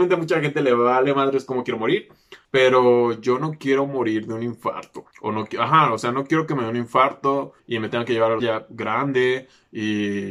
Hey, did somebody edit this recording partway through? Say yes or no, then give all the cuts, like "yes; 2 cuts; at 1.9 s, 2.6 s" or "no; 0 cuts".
yes; 4 cuts; at 2.4 s, 5.1 s, 7.6 s, 8.4 s